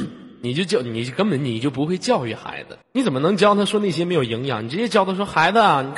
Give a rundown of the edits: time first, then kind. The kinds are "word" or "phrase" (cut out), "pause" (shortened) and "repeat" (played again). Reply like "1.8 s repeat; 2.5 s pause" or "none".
2.8 s pause